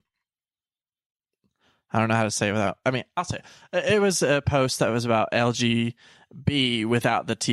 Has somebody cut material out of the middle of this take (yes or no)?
no